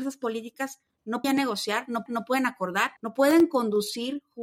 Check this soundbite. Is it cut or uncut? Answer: cut